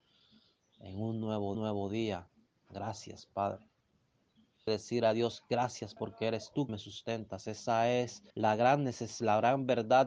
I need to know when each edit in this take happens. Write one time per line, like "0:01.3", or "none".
0:01.5
0:04.7
0:06.0
0:06.7
0:08.3